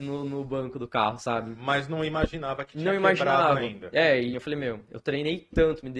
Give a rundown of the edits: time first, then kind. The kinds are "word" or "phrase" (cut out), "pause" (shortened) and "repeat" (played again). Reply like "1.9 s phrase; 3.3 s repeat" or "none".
4.3 s word